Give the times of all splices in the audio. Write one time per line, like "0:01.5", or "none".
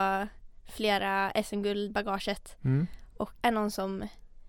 0:01.9
0:03.4